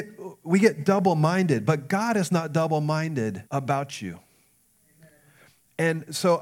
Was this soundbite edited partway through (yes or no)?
yes